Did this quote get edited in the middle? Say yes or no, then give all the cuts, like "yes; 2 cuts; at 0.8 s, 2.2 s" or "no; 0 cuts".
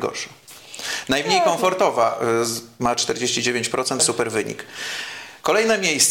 yes; 1 cut; at 4.0 s